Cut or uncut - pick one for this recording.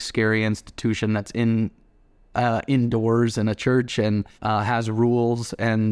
cut